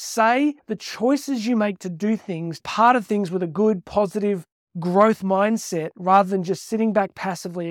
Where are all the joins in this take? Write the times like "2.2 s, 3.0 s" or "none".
2.6 s